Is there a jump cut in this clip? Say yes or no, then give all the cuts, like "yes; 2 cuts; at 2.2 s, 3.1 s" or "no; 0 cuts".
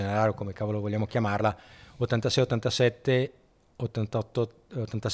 no; 0 cuts